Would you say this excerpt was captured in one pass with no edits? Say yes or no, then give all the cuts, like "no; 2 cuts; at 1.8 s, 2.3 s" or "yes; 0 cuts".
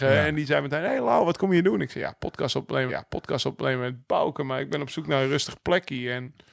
no; 1 cut; at 2.9 s